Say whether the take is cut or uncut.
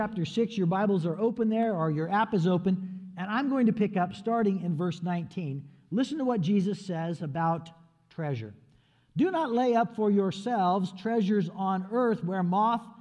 uncut